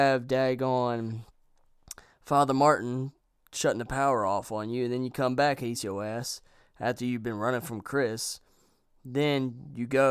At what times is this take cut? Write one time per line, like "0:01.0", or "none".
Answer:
0:05.7